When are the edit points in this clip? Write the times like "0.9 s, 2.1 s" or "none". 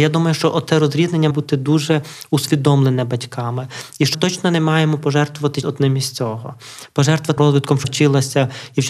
1.3 s, 4.1 s, 5.6 s, 7.4 s, 7.8 s